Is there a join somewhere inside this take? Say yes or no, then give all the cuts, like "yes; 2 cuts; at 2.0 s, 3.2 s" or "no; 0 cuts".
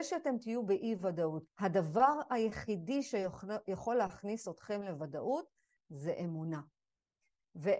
yes; 1 cut; at 1.4 s